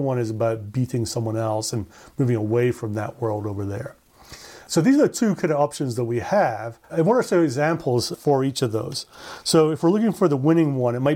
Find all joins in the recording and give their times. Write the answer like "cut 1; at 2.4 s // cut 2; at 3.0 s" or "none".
cut 1; at 6.8 s